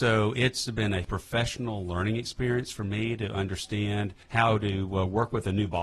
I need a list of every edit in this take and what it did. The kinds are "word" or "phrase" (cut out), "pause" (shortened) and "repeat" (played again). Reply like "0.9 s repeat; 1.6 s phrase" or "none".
1.0 s word; 4.2 s pause